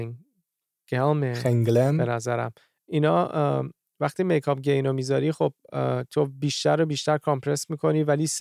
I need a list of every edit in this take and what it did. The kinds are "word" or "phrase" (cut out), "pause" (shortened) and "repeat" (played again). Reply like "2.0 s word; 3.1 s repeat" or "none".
none